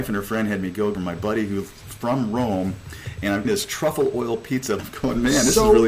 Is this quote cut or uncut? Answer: cut